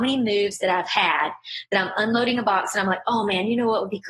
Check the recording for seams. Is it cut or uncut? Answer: uncut